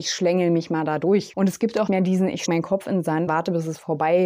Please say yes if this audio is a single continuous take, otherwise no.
no